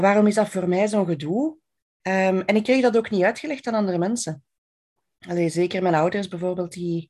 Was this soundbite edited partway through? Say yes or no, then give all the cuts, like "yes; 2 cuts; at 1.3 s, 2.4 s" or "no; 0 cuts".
no; 0 cuts